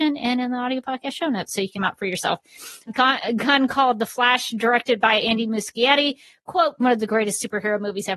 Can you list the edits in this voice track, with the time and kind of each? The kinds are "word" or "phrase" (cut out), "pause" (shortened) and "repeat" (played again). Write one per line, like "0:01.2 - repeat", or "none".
0:01.7 - word
0:02.9 - word
0:06.8 - word

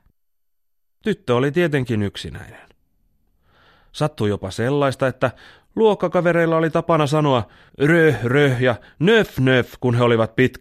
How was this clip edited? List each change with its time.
0:07.7 - pause

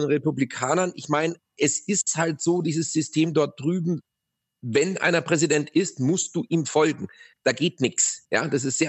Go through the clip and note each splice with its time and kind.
none

